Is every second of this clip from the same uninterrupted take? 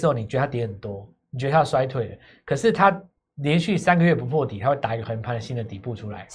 yes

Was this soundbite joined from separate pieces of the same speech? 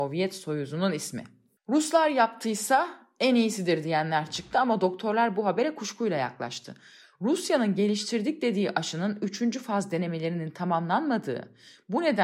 no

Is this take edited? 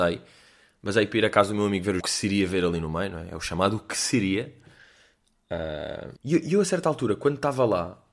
yes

